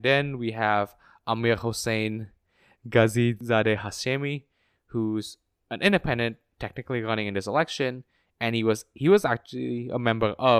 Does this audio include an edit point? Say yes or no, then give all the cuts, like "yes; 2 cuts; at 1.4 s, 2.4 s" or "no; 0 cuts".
no; 0 cuts